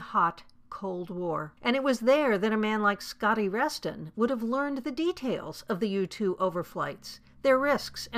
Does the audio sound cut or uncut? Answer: cut